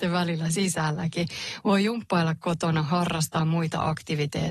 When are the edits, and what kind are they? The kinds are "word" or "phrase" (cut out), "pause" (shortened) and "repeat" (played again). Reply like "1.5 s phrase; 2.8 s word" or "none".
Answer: none